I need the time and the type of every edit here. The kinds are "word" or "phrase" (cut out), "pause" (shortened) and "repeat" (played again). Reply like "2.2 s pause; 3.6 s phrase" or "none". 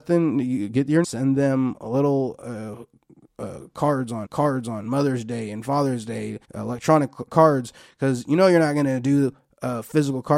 1.0 s phrase; 4.3 s repeat; 6.4 s pause

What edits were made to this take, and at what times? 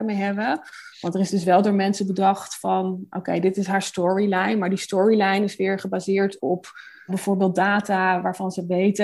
7.1 s word

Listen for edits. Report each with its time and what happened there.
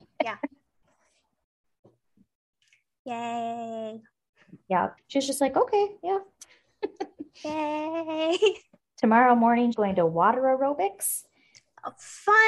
5.0 s pause; 9.7 s word

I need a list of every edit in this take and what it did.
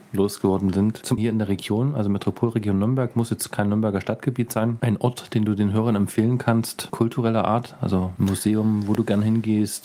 1.2 s phrase

